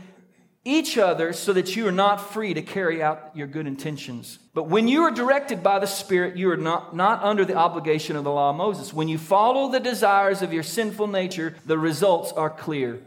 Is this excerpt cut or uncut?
cut